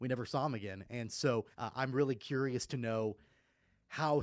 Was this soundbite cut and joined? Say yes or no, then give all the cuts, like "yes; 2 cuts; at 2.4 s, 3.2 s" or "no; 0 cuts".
yes; 1 cut; at 1.5 s